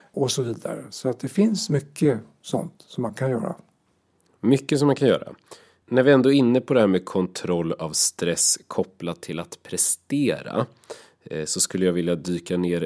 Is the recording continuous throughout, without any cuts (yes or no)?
yes